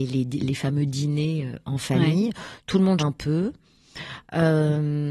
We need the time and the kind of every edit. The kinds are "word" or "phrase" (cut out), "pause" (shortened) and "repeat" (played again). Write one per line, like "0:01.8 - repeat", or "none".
0:03.0 - word